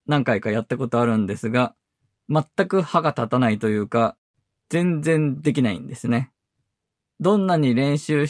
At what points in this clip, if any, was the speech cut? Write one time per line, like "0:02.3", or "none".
none